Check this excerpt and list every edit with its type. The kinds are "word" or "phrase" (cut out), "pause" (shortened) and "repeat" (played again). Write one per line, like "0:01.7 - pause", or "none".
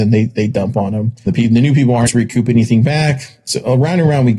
0:01.3 - word
0:02.1 - word